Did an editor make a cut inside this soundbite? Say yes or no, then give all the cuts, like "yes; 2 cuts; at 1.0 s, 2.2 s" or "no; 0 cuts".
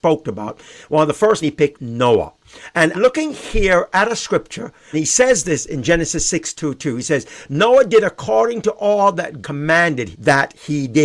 yes; 6 cuts; at 1.4 s, 1.7 s, 2.9 s, 4.9 s, 9.4 s, 10.1 s